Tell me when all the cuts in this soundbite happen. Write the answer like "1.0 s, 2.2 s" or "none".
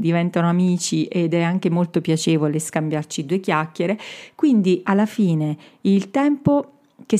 none